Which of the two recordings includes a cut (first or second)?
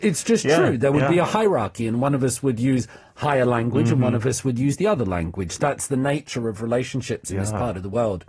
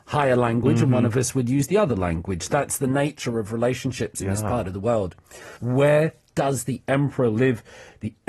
second